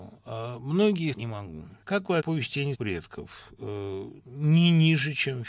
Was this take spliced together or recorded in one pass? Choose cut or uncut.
cut